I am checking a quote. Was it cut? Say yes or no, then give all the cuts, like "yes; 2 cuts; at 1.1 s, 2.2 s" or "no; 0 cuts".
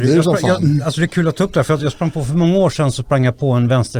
no; 0 cuts